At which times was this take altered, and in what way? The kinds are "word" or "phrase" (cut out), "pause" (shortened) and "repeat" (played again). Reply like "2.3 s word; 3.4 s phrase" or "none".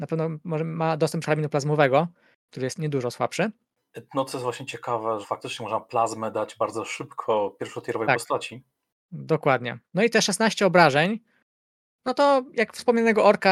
1.2 s word; 2.8 s word; 5.2 s word